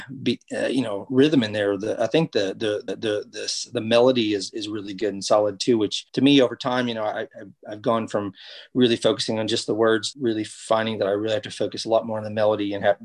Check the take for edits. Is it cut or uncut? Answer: cut